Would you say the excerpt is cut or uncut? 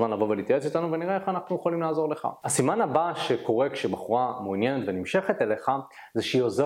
uncut